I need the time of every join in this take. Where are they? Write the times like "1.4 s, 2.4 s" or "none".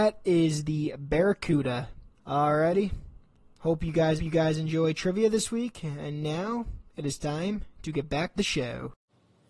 2.1 s, 4.2 s, 8.4 s